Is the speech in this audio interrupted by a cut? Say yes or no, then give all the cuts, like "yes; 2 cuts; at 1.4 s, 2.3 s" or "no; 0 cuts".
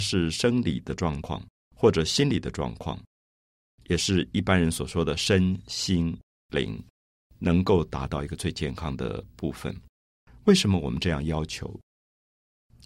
no; 0 cuts